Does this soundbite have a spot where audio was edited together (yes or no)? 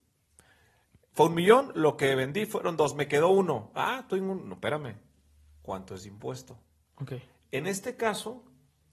no